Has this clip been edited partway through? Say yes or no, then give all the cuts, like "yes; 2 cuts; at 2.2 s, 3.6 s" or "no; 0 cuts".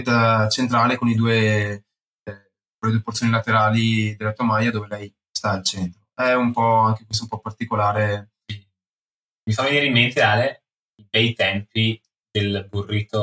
no; 0 cuts